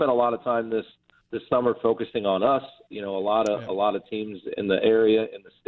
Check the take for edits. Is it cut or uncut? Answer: uncut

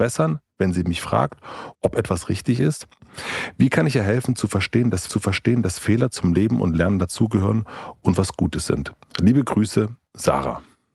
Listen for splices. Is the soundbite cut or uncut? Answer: cut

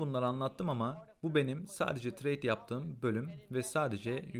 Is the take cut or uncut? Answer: uncut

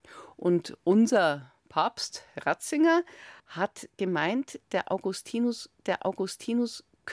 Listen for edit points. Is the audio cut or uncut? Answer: cut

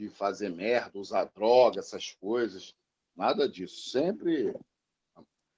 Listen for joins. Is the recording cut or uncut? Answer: uncut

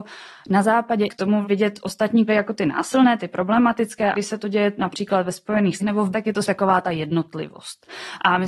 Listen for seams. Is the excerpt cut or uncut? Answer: cut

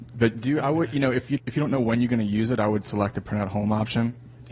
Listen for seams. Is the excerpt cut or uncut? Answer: cut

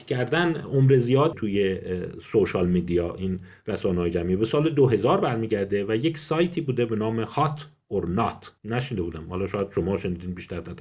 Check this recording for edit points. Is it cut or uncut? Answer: cut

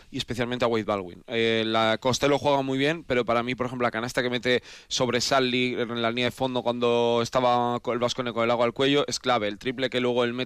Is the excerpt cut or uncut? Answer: uncut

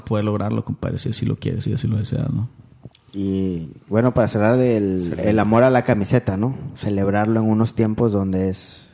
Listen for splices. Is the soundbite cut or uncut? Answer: uncut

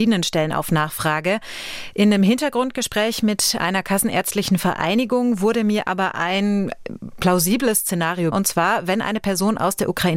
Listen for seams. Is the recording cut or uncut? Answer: cut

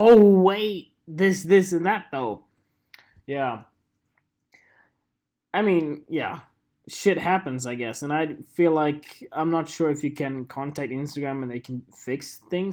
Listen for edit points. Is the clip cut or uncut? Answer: uncut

